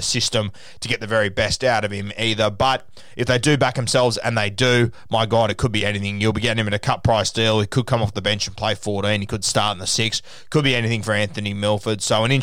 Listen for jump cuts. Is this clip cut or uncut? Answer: uncut